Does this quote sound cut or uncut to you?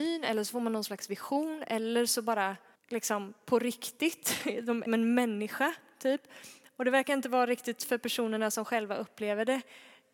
cut